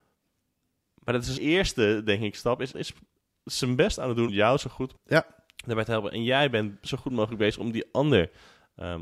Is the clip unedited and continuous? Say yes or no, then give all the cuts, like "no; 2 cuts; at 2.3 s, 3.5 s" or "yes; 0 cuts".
no; 4 cuts; at 1.4 s, 2.7 s, 4.3 s, 5.0 s